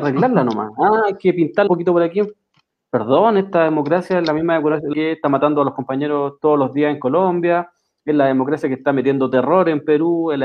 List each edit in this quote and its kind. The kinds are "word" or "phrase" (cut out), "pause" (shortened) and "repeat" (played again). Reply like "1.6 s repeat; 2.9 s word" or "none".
1.7 s word; 4.9 s word